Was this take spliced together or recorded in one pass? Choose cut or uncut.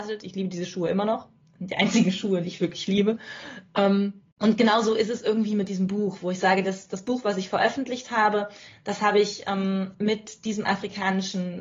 cut